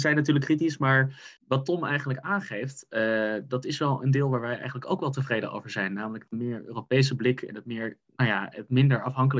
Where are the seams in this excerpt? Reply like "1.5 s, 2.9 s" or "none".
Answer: 1.4 s